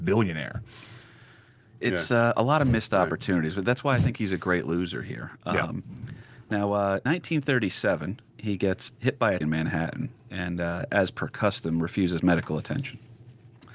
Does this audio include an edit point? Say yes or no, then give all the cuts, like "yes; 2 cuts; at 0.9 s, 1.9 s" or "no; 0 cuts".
yes; 3 cuts; at 7.1 s, 8.9 s, 9.4 s